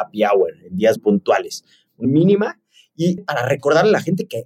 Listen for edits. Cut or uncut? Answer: cut